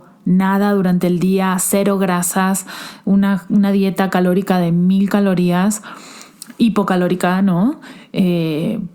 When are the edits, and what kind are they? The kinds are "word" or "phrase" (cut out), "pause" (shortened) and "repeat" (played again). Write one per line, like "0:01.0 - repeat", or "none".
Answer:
none